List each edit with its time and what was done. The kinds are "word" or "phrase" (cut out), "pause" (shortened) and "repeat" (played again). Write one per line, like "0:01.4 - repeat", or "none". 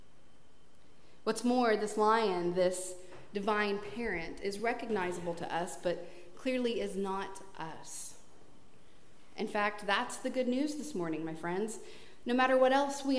none